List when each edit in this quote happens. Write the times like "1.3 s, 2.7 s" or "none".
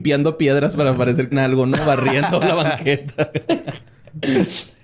1.3 s